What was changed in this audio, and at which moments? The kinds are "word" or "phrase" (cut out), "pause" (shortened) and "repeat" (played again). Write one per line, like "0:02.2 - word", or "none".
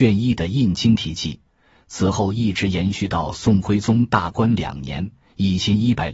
none

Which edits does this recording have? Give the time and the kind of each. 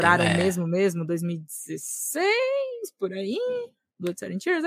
none

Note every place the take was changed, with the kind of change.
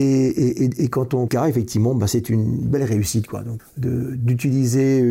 0:01.3 - phrase
0:03.6 - word

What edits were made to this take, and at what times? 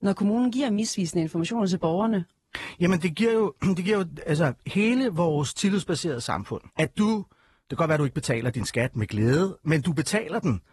0:06.7 - pause

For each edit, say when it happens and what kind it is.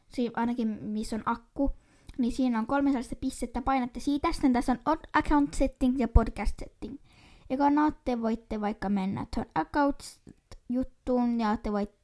none

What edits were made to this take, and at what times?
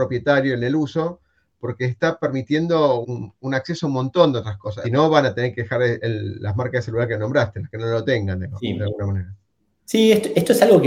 0:03.0 - word
0:04.8 - phrase

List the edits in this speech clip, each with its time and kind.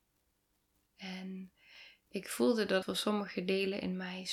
0:02.8 - word

